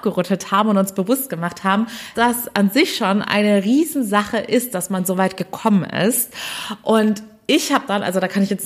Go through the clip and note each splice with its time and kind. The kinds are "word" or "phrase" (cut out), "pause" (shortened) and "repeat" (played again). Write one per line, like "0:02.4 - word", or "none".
0:02.1 - word